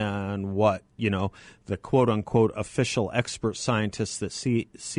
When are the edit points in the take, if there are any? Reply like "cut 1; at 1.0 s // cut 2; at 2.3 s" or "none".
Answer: none